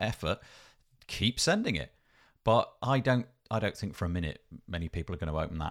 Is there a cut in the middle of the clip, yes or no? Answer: no